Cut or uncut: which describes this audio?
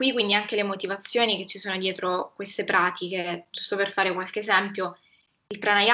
uncut